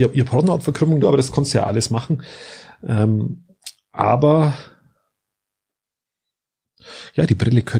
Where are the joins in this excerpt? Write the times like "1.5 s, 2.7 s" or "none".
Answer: 1.0 s, 1.7 s, 3.8 s